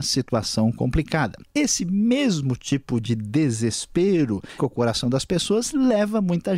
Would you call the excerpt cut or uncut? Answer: cut